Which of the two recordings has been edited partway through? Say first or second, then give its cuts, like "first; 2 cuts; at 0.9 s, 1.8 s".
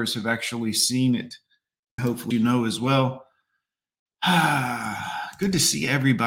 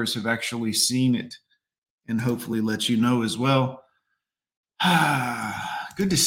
first; 2 cuts; at 2.0 s, 2.3 s